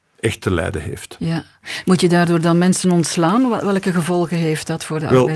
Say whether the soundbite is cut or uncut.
uncut